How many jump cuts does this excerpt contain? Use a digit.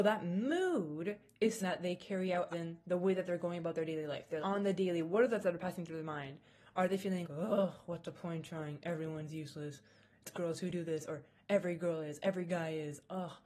6